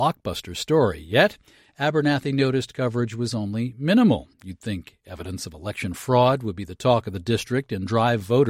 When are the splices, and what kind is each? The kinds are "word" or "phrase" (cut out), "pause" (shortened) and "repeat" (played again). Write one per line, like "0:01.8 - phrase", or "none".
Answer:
0:04.3 - pause